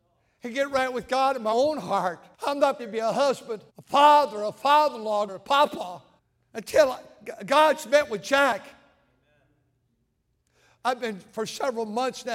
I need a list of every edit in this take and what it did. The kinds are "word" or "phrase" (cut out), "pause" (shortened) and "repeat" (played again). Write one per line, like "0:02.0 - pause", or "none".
0:02.3 - pause
0:02.8 - word
0:03.7 - pause
0:05.3 - word
0:06.2 - pause